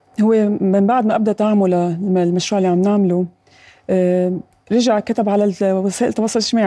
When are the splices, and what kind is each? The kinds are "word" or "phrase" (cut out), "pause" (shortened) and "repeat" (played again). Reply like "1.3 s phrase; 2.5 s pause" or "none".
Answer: none